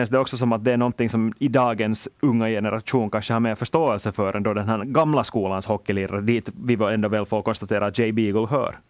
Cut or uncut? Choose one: uncut